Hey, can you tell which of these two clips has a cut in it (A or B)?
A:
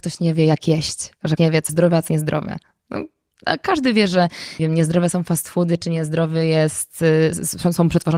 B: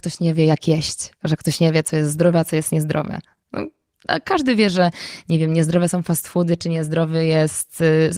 A